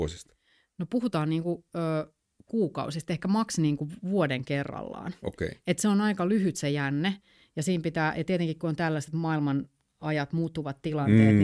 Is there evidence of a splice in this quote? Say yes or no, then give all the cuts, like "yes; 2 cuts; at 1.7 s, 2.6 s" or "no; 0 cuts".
no; 0 cuts